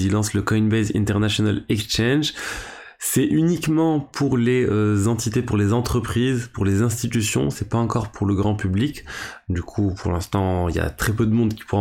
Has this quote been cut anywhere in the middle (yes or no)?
no